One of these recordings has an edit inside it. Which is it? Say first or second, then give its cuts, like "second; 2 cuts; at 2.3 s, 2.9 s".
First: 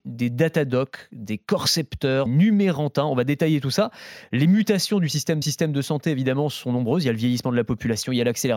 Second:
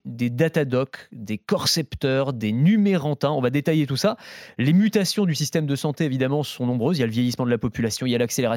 first; 2 cuts; at 2.3 s, 5.4 s